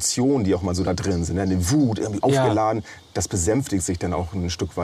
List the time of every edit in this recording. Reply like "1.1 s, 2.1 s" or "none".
2.2 s

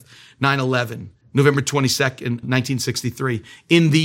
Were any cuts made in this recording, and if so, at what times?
1.2 s, 2.4 s

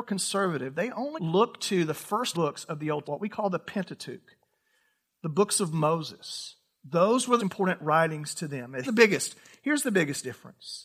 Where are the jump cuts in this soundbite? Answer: 1.2 s, 2.3 s, 3.0 s, 7.4 s, 8.8 s

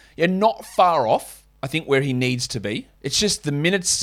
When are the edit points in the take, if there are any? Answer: 2.9 s

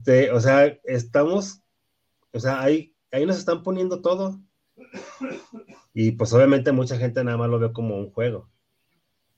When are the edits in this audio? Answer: none

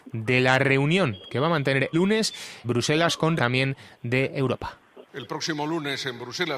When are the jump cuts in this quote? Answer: 1.9 s, 2.6 s, 3.4 s, 5.1 s

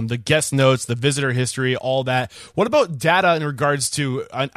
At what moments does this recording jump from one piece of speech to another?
none

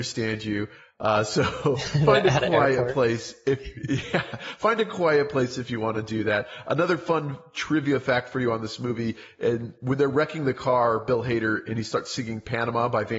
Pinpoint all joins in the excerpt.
none

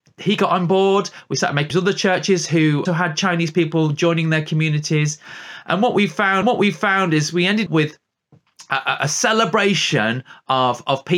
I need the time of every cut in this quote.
1.7 s, 2.9 s, 6.4 s, 7.7 s

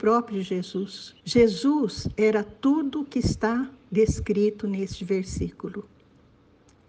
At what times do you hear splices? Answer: 1.2 s

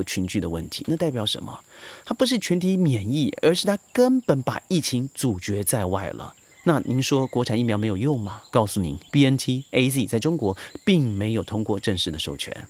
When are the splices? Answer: 6.5 s, 8.5 s, 9.1 s

